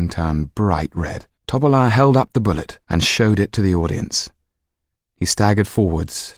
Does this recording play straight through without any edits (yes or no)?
no